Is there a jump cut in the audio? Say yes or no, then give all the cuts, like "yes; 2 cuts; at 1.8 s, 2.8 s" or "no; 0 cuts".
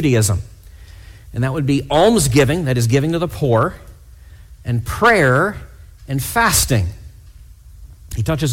no; 0 cuts